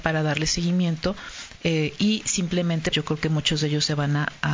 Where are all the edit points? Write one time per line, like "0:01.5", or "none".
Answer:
0:02.9